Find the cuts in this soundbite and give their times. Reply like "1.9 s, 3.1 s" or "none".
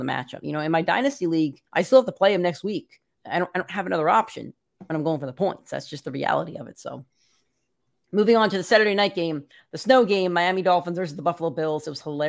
1.7 s, 8.0 s, 9.5 s